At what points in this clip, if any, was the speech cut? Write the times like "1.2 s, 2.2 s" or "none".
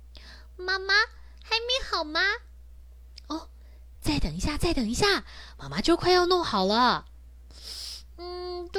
none